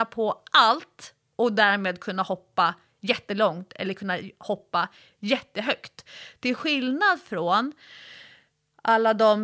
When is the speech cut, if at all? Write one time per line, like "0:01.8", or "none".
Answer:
none